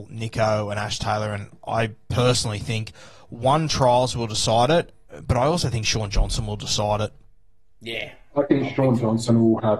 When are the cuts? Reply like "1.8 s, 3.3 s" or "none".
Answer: none